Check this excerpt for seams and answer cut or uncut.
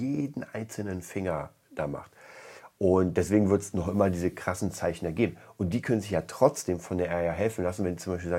uncut